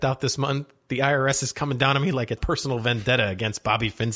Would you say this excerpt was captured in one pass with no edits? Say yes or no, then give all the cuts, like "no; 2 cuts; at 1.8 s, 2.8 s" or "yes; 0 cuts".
no; 1 cut; at 2.4 s